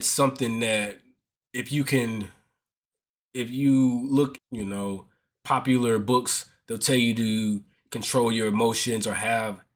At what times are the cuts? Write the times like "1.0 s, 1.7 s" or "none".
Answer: 4.4 s